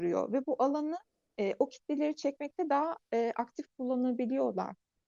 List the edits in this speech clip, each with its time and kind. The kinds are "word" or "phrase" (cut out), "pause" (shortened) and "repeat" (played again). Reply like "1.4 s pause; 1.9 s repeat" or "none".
none